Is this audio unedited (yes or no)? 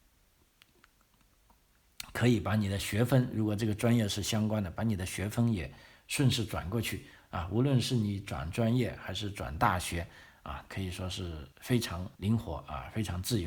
no